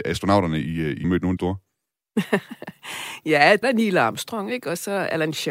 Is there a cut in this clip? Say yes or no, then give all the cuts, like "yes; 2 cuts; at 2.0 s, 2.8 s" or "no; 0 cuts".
yes; 3 cuts; at 1.0 s, 1.4 s, 3.6 s